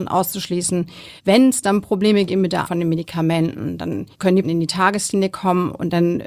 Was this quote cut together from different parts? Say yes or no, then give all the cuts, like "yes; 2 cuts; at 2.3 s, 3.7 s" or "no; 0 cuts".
yes; 5 cuts; at 1.2 s, 2.3 s, 2.6 s, 4.1 s, 4.4 s